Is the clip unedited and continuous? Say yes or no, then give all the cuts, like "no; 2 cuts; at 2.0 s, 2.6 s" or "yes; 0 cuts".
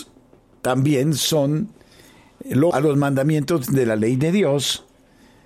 no; 1 cut; at 2.7 s